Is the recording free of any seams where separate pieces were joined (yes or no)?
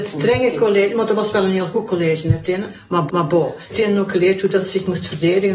no